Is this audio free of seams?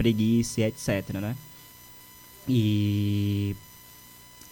yes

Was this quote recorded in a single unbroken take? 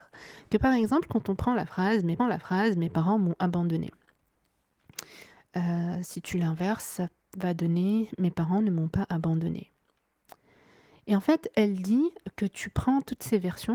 no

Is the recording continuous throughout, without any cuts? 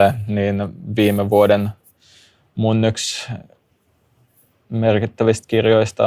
yes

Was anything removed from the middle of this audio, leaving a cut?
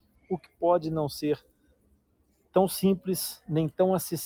no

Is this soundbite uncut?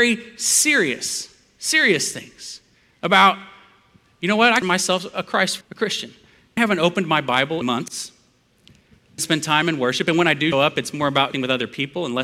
no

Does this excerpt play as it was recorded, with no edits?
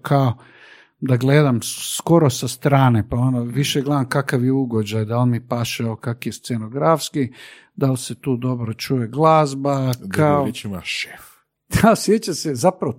yes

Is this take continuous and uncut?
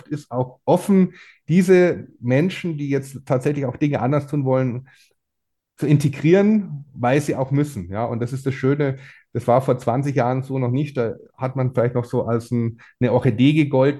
yes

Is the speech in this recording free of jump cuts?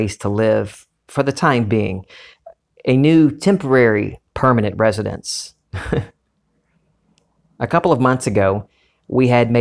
yes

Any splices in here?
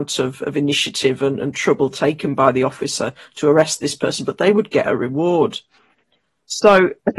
no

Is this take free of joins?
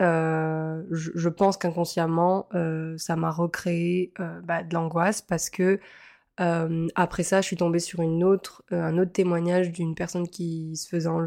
yes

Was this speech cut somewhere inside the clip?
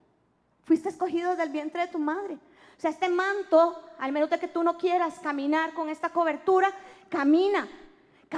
no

